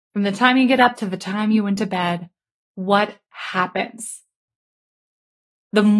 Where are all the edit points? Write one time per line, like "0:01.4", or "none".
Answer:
none